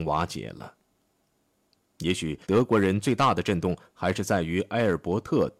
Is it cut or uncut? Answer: cut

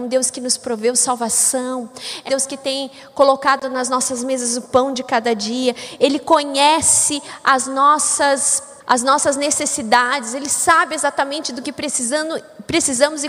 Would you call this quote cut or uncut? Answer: cut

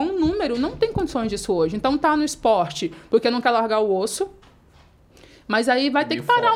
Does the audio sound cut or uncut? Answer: uncut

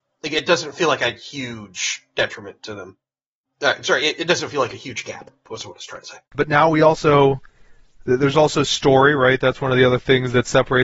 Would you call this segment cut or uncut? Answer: cut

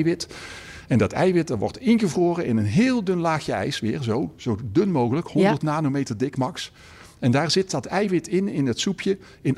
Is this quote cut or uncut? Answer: uncut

